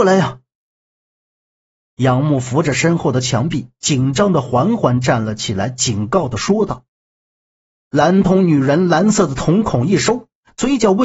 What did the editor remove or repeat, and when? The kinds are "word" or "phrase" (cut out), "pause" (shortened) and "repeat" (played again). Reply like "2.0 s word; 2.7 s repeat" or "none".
6.9 s pause